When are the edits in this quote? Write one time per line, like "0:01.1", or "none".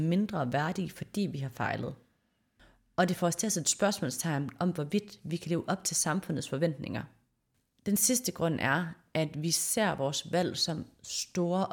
none